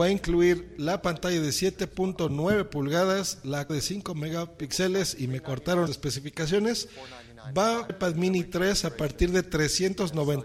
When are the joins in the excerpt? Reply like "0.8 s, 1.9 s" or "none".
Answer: 3.7 s, 5.9 s, 7.9 s